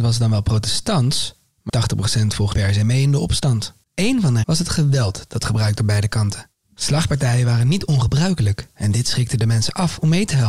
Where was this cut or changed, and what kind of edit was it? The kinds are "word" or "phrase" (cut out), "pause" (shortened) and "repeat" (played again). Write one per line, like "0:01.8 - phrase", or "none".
0:01.7 - word
0:02.5 - word
0:04.4 - word
0:05.8 - word